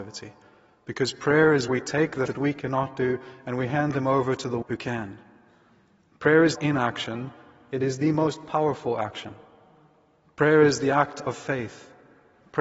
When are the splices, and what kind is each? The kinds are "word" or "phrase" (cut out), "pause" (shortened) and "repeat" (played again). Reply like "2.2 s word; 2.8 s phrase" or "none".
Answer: 1.7 s word; 2.3 s word; 4.6 s word; 6.5 s word